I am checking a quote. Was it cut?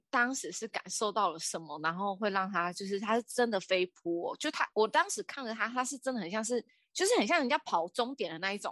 no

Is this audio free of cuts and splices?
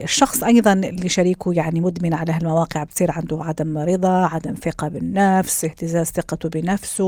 yes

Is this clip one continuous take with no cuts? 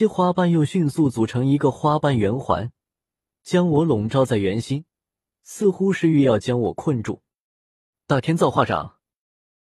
yes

